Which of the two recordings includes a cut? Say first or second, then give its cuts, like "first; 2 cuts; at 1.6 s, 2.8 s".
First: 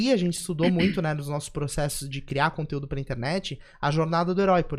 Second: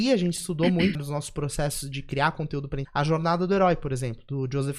second; 2 cuts; at 0.9 s, 2.8 s